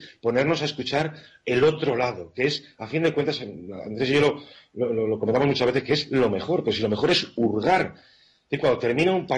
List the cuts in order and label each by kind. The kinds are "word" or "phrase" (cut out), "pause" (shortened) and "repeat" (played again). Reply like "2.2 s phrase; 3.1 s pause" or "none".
none